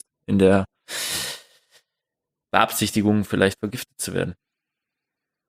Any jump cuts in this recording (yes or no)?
no